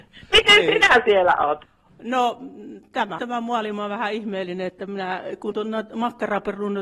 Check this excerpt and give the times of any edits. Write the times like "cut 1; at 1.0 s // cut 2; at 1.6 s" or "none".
cut 1; at 3.2 s // cut 2; at 5.5 s